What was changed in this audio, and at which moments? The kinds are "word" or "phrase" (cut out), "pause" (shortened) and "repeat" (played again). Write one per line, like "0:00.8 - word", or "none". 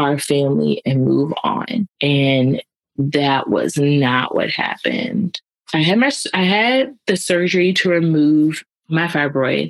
none